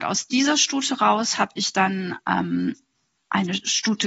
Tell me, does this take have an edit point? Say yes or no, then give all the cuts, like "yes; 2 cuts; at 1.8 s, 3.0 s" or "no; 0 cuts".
no; 0 cuts